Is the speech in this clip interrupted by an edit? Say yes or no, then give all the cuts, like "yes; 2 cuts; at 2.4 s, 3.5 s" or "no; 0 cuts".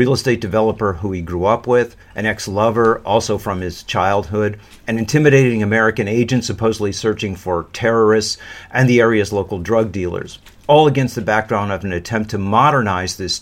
no; 0 cuts